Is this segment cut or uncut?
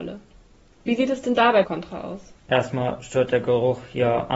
cut